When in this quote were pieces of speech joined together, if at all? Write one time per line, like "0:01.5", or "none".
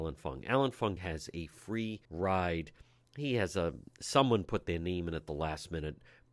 0:01.0
0:02.0